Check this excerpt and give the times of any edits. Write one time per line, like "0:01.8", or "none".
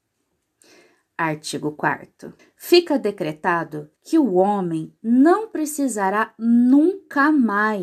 0:02.4
0:04.0